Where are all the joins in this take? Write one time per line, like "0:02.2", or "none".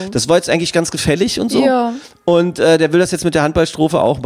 none

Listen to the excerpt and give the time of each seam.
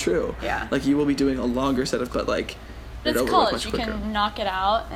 0:02.1
0:03.0

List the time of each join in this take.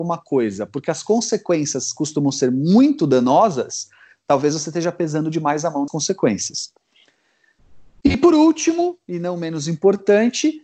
0:05.9

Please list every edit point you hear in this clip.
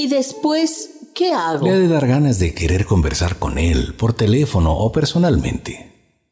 none

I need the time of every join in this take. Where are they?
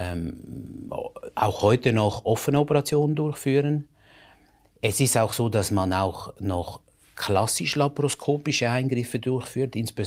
none

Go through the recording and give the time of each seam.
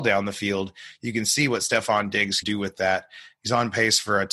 0:02.4

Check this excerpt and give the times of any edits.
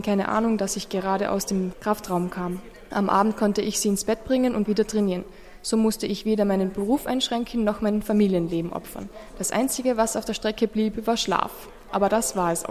0:04.7

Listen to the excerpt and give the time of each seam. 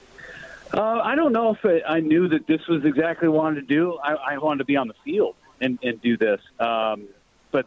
0:04.4
0:06.5

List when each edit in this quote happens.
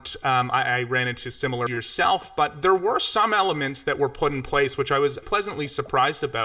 0:01.7
0:05.2

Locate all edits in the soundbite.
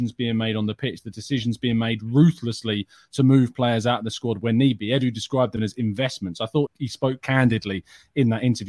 0:05.6
0:06.7
0:07.2

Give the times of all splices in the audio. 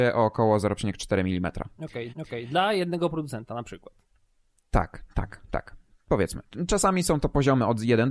0:02.1

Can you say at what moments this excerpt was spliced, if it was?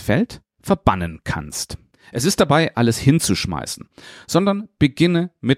0:01.9
0:02.7

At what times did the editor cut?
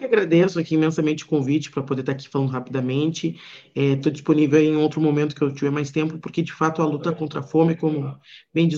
none

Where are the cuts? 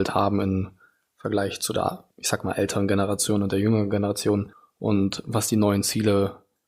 0:02.1

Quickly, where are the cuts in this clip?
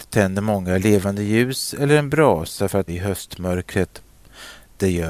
0:02.9

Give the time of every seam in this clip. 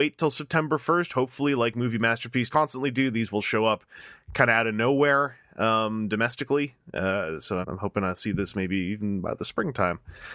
0:02.5
0:07.6

